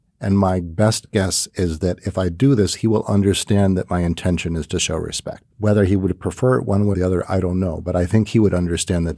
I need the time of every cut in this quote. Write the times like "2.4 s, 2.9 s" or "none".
5.5 s, 6.9 s